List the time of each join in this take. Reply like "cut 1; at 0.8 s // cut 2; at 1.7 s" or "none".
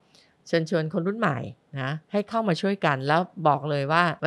cut 1; at 2.0 s